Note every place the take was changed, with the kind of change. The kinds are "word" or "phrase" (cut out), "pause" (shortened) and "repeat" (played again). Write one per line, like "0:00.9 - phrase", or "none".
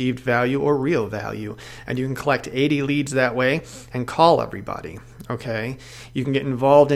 none